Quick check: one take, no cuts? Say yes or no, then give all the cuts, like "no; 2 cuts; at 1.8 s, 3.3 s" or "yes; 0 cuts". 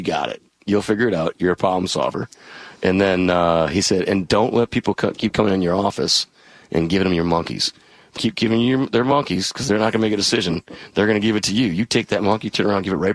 no; 1 cut; at 8.2 s